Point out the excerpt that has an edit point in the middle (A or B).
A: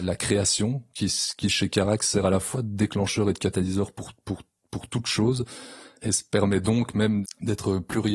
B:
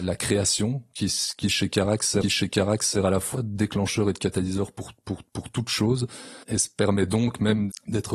B